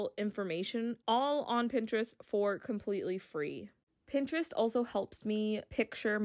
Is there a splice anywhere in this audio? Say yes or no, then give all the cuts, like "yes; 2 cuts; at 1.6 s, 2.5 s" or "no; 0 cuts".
no; 0 cuts